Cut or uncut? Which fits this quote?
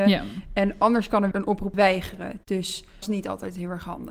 cut